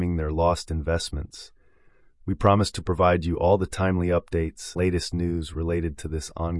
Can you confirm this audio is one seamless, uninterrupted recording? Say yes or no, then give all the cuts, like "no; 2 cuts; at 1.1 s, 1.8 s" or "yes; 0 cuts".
no; 1 cut; at 4.8 s